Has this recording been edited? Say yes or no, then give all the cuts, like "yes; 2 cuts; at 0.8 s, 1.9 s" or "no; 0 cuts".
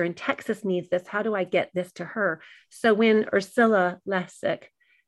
no; 0 cuts